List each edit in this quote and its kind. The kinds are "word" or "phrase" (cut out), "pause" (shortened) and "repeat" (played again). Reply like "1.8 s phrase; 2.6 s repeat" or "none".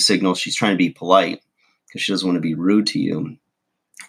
none